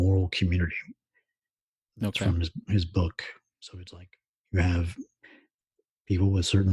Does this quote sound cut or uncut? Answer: uncut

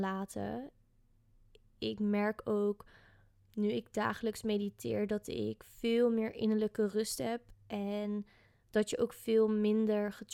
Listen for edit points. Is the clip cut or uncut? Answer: uncut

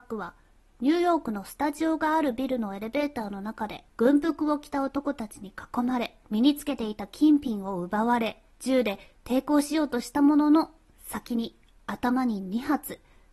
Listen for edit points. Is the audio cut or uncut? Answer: cut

